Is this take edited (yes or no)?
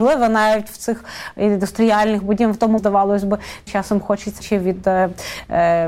yes